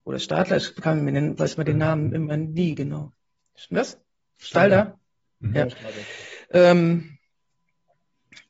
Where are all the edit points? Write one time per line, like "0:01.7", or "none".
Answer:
none